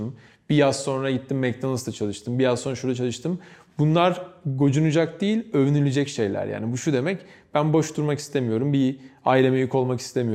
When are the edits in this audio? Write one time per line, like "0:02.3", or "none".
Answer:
none

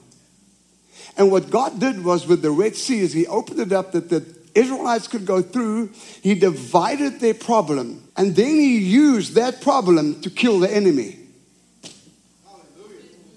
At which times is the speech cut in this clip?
0:08.1

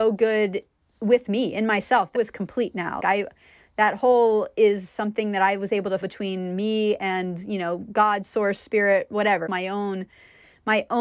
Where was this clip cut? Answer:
0:02.1
0:03.0
0:06.0
0:09.5

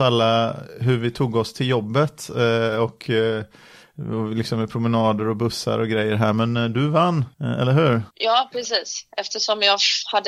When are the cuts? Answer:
0:07.3
0:08.1

